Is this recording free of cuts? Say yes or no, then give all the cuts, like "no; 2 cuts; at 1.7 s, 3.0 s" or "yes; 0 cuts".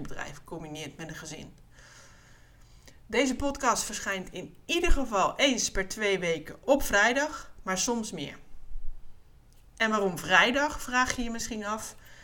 yes; 0 cuts